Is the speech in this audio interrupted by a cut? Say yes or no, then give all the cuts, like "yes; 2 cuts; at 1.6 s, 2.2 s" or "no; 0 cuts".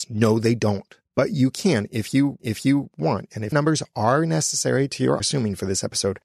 yes; 4 cuts; at 1.0 s, 2.4 s, 3.5 s, 5.2 s